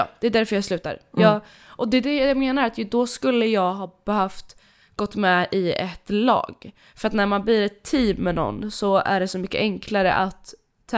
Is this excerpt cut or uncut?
uncut